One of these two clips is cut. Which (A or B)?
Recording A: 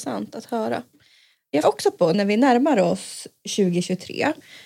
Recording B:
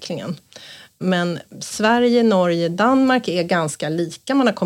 A